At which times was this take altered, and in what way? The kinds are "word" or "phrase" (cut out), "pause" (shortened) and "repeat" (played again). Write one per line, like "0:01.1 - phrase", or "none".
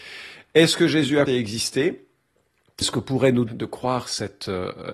0:01.3 - word
0:02.8 - word
0:03.5 - word